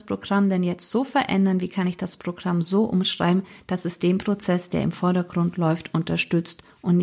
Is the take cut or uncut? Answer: uncut